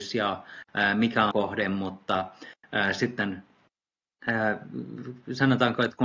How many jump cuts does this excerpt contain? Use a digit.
1